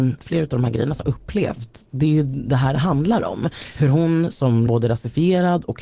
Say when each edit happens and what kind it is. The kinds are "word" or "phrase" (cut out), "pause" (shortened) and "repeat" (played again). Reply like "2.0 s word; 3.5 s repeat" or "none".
1.0 s word; 4.7 s word